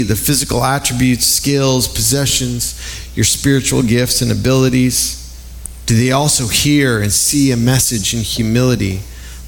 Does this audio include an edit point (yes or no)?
no